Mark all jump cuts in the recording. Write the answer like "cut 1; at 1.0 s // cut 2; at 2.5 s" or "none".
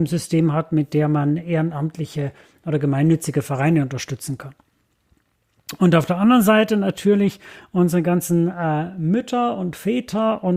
none